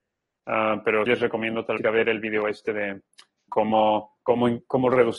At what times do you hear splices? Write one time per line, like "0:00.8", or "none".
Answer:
0:01.1
0:01.8
0:03.5